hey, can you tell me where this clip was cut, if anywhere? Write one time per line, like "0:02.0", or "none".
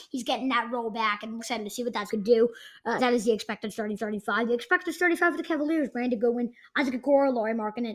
0:01.4
0:02.1
0:03.0
0:04.0